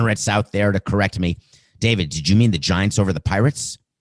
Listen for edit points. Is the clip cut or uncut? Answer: uncut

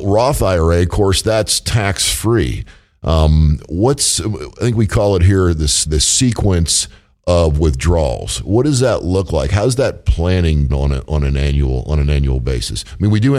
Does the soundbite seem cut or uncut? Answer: cut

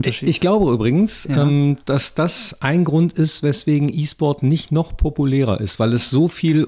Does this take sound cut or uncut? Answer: cut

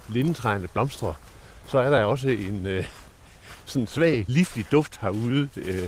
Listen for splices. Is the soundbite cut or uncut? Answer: uncut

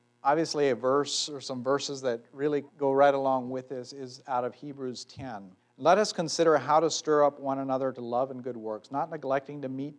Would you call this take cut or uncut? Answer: cut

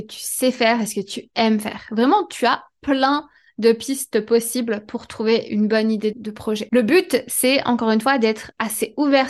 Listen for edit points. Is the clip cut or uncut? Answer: uncut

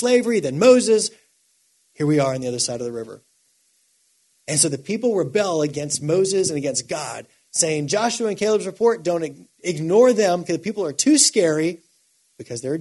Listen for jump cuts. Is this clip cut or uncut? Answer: uncut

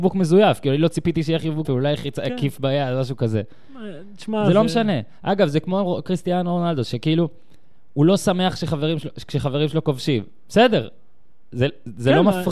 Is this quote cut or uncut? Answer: cut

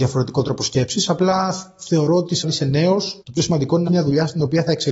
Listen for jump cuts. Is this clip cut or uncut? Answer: cut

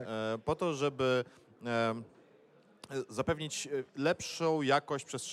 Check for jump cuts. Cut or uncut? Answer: cut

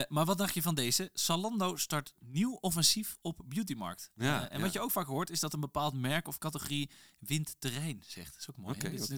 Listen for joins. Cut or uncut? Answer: uncut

